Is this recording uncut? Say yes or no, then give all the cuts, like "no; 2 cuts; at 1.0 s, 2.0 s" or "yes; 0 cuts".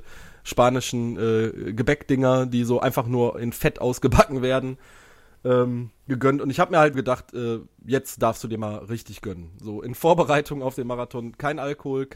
no; 1 cut; at 6.9 s